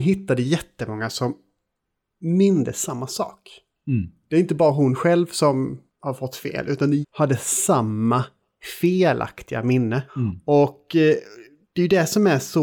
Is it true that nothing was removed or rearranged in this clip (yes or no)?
no